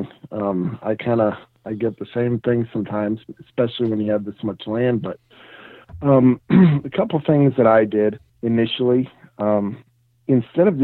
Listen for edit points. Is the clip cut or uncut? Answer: cut